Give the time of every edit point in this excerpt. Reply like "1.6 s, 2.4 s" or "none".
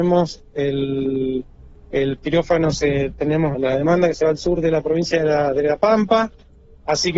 3.5 s